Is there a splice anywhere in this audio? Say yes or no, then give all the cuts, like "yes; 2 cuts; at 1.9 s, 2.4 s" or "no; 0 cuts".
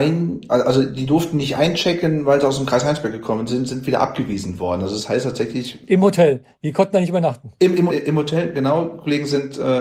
yes; 1 cut; at 7.9 s